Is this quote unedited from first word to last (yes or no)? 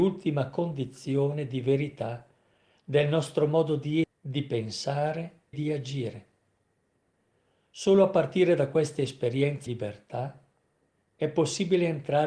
no